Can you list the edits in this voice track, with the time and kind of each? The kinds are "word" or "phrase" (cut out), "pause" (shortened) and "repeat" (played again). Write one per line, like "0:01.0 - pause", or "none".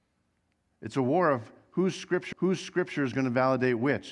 0:02.3 - repeat